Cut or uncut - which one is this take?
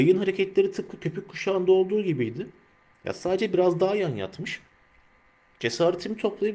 uncut